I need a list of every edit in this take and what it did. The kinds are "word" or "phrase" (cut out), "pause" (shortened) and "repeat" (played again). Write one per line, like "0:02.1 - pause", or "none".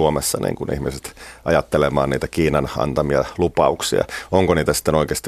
none

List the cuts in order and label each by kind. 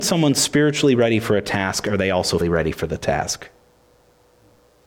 0:02.4 - word

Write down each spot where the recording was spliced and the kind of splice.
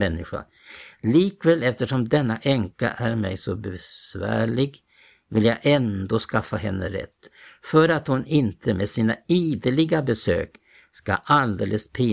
none

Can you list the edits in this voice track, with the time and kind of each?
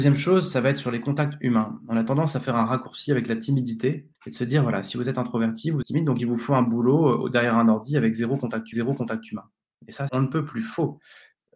0:04.1 - pause
0:05.8 - word
0:08.7 - repeat
0:10.1 - word

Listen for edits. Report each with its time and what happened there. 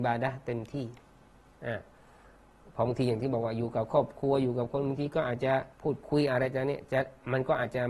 0:05.7 - pause

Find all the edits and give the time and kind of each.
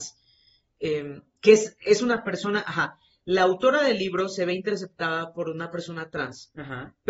none

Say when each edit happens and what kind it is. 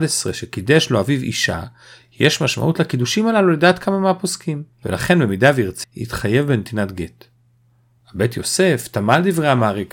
0:04.7 - pause
0:05.8 - word

